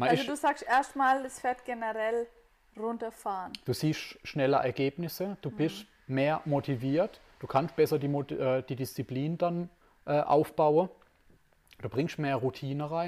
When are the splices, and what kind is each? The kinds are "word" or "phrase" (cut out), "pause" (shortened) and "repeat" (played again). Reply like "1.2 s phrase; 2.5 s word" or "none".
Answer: none